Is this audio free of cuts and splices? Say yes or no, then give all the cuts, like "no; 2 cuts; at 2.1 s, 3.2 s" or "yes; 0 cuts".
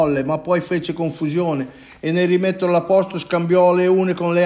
yes; 0 cuts